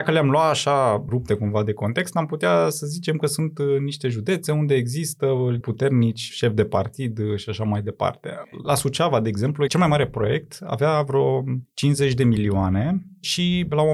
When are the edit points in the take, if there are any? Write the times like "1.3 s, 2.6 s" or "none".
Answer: 5.6 s